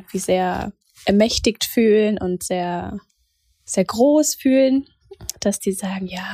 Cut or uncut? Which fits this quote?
uncut